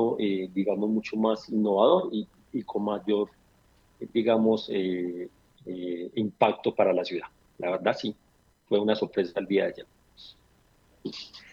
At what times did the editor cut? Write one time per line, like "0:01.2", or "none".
none